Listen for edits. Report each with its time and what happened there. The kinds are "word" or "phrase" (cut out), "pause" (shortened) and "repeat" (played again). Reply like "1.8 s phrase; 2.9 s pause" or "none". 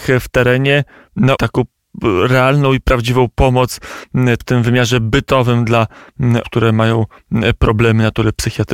1.4 s word; 4.4 s word; 6.4 s word